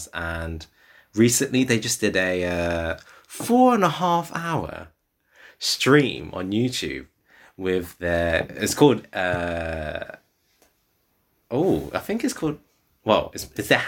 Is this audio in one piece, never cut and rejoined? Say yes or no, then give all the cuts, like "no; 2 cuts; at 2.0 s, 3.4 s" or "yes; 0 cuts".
yes; 0 cuts